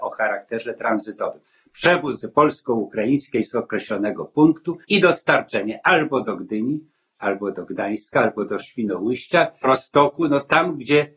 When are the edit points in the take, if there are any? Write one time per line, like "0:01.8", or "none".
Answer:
0:02.2
0:04.8
0:08.6
0:09.6